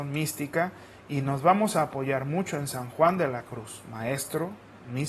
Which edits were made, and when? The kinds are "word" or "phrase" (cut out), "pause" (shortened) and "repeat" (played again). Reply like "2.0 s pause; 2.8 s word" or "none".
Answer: none